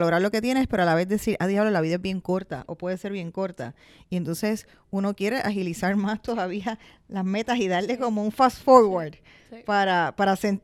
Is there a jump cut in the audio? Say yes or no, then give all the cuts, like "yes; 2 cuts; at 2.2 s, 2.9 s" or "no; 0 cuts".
no; 0 cuts